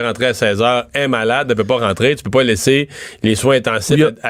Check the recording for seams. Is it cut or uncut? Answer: uncut